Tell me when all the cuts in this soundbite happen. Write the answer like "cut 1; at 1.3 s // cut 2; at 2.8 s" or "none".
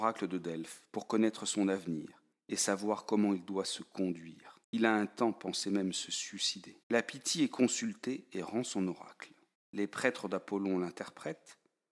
cut 1; at 2.3 s // cut 2; at 4.6 s // cut 3; at 6.8 s // cut 4; at 9.5 s

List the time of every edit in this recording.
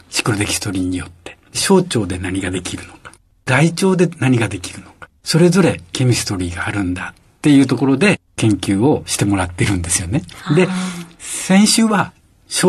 cut 1; at 5.2 s

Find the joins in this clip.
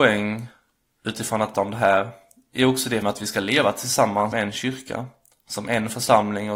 cut 1; at 1.5 s // cut 2; at 3.0 s // cut 3; at 4.3 s

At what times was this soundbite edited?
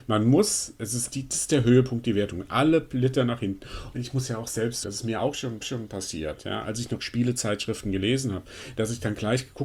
cut 1; at 1.1 s // cut 2; at 4.8 s // cut 3; at 5.6 s

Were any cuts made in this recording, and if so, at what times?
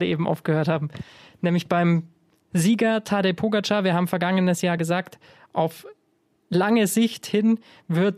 none

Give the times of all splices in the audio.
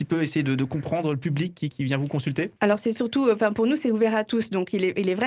cut 1; at 1.7 s // cut 2; at 2.6 s

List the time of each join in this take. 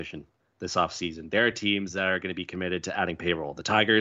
none

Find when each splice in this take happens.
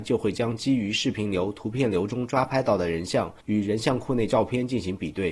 cut 1; at 3.4 s

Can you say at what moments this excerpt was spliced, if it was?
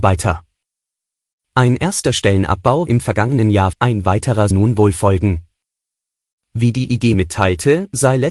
cut 1; at 2.9 s // cut 2; at 3.7 s // cut 3; at 4.5 s // cut 4; at 7.1 s

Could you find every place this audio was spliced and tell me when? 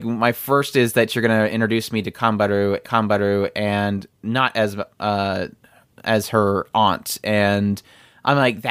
cut 1; at 2.8 s

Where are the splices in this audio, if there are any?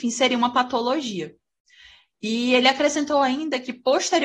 none

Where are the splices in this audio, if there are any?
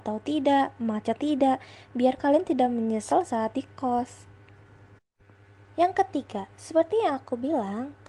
cut 1; at 1.2 s

